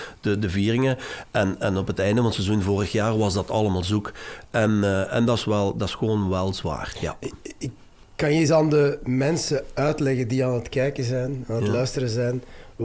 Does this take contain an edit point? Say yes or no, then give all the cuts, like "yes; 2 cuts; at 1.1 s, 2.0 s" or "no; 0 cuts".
no; 0 cuts